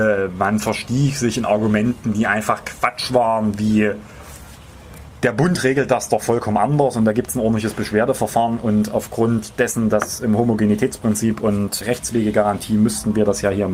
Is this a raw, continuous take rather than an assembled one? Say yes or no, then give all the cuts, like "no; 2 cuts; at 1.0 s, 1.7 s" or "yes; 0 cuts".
no; 1 cut; at 11.8 s